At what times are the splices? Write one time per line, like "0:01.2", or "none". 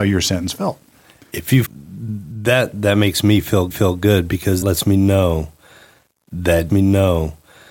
0:01.6
0:03.7
0:04.6
0:06.7